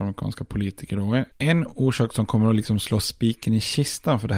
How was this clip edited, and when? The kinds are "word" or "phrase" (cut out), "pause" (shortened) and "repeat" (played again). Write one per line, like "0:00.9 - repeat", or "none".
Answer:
0:01.3 - pause